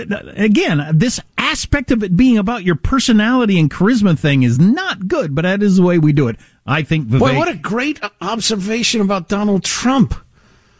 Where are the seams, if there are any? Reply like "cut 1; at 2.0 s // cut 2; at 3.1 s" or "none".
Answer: none